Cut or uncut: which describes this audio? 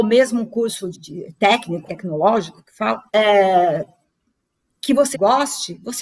cut